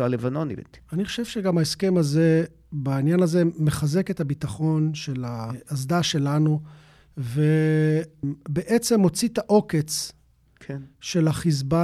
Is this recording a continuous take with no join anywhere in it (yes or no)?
yes